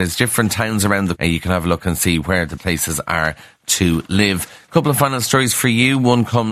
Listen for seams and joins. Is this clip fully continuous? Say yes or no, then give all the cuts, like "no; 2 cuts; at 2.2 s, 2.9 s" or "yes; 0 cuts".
no; 2 cuts; at 1.2 s, 2.6 s